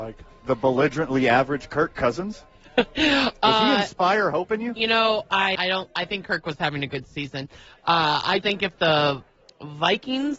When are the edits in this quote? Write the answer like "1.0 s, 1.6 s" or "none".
5.6 s, 8.4 s